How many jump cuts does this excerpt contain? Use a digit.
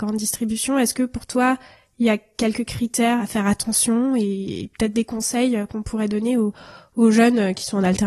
1